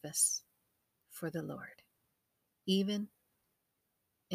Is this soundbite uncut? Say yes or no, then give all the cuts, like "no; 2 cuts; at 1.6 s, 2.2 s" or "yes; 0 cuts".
yes; 0 cuts